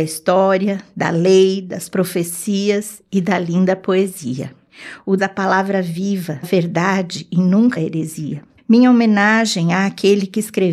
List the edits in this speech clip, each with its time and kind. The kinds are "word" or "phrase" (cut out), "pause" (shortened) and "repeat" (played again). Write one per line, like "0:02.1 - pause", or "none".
0:05.2 - word
0:06.4 - word
0:07.8 - word
0:08.6 - pause